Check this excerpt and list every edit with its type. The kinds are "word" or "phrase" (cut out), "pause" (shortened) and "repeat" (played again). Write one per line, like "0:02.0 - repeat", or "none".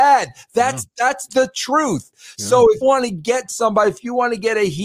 0:02.8 - word